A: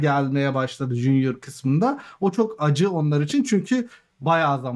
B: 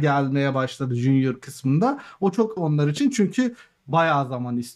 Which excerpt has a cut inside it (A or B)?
B